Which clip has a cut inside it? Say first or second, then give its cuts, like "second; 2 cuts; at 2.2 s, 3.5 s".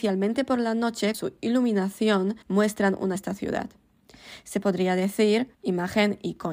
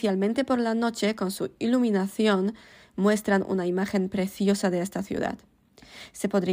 first; 4 cuts; at 1.1 s, 2.4 s, 3.1 s, 5.5 s